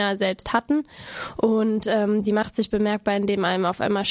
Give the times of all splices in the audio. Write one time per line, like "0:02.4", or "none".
none